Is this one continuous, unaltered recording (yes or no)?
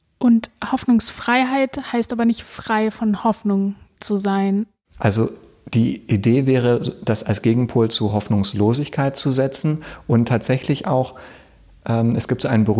yes